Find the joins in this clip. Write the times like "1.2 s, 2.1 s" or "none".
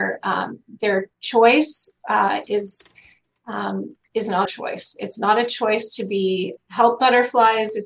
1.1 s, 4.1 s, 4.5 s, 6.6 s